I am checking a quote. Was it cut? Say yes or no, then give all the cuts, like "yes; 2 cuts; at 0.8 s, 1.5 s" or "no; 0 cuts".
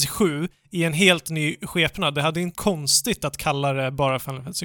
yes; 1 cut; at 2.5 s